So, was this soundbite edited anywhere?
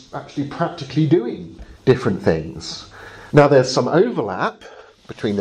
yes; 2 cuts; at 1.8 s, 3.3 s

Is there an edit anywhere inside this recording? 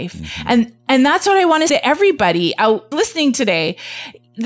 yes; 2 cuts; at 1.7 s, 2.9 s

